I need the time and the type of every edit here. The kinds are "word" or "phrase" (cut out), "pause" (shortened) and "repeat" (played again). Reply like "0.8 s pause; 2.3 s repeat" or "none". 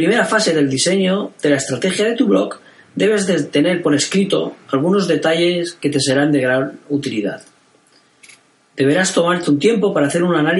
none